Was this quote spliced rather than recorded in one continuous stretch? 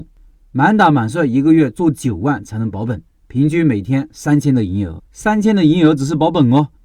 yes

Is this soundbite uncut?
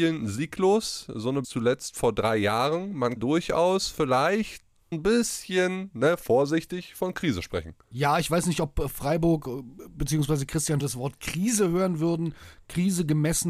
no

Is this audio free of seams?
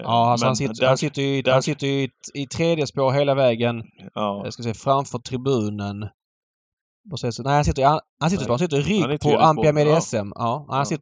no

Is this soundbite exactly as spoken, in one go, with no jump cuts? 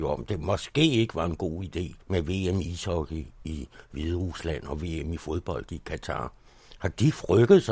no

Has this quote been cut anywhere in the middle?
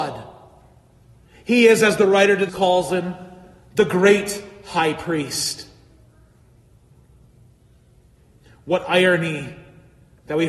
yes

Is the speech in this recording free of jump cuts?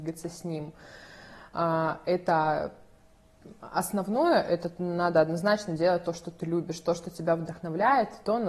yes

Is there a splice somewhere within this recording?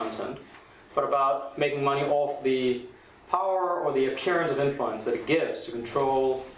no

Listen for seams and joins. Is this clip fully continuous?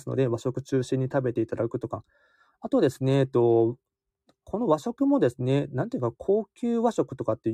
yes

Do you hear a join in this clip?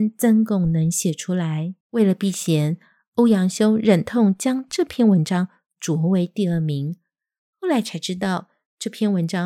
yes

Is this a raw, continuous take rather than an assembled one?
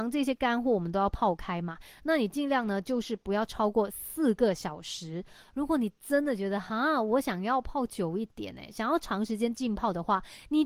yes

